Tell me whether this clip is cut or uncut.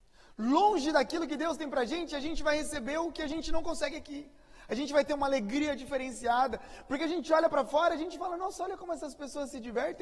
uncut